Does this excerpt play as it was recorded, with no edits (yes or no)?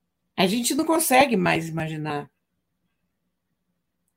yes